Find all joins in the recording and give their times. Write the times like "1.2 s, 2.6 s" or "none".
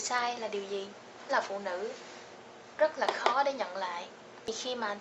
1.3 s